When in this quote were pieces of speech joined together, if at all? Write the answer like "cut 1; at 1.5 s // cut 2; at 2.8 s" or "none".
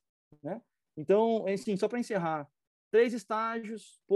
none